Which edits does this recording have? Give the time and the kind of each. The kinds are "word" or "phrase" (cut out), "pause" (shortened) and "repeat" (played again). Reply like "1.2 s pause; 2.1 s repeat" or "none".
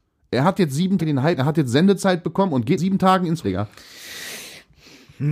1.0 s word; 1.4 s word; 2.8 s word; 3.4 s word